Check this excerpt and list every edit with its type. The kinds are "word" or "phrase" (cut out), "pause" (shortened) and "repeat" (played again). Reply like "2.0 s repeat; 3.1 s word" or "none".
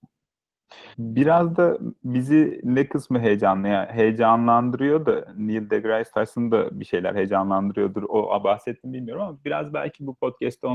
0.9 s pause